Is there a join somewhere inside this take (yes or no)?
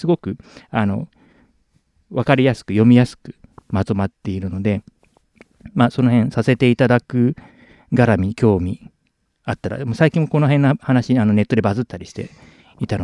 no